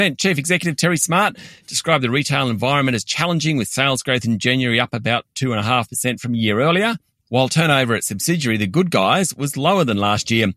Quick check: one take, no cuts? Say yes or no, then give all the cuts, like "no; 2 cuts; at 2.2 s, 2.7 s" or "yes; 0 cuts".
yes; 0 cuts